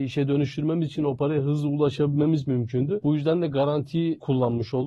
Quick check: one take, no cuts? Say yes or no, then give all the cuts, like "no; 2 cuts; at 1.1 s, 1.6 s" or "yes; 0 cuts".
yes; 0 cuts